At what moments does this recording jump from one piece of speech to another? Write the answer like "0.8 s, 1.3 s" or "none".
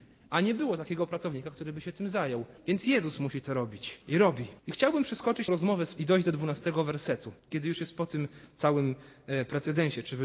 2.6 s, 4.0 s, 4.6 s, 5.5 s, 6.0 s, 7.4 s